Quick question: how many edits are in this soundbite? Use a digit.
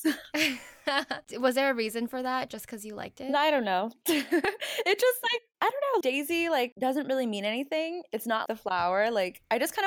2